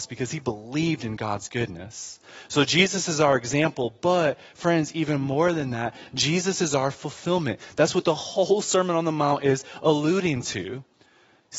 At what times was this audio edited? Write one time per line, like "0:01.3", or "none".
none